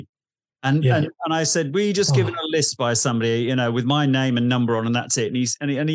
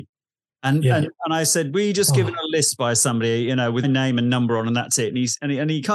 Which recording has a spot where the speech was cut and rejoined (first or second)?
second